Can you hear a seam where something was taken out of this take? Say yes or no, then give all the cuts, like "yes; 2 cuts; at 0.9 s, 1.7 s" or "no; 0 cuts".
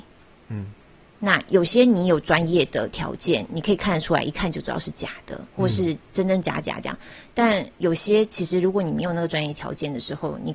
yes; 1 cut; at 5.5 s